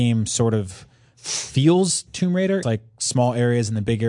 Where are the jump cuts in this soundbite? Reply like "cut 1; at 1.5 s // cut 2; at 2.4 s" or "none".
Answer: cut 1; at 2.1 s // cut 2; at 2.6 s